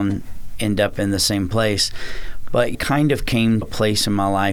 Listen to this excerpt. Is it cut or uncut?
cut